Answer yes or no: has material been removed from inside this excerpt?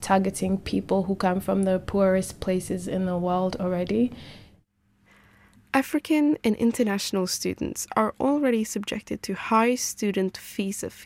no